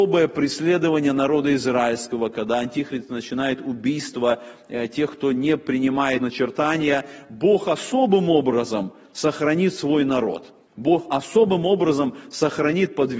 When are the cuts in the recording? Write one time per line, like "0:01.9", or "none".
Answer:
0:06.2
0:10.7